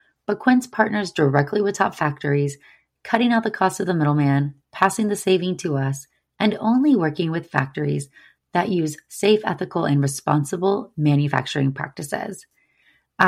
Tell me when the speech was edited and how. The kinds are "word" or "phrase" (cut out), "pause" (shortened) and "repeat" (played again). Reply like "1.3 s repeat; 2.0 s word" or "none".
none